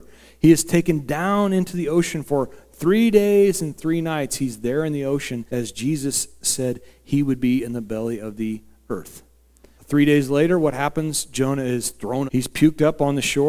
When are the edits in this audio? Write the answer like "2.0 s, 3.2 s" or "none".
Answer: 5.5 s, 9.7 s, 12.3 s